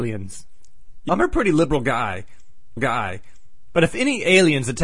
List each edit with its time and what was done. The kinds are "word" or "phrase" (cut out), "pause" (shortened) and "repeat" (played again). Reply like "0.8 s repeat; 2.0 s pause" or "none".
1.1 s word; 2.8 s repeat